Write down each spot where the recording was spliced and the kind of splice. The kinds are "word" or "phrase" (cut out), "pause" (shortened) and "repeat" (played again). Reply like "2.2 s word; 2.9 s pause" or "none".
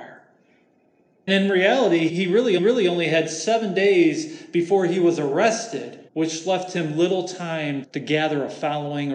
1.3 s word; 2.1 s word; 2.6 s repeat; 6.1 s pause; 7.8 s word